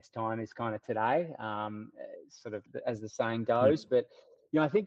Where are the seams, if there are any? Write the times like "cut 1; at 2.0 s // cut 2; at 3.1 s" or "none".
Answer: cut 1; at 2.7 s